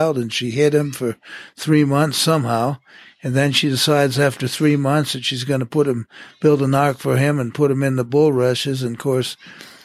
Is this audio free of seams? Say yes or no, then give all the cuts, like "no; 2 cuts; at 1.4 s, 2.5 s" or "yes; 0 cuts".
yes; 0 cuts